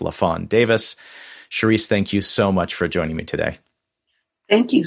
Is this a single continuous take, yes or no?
yes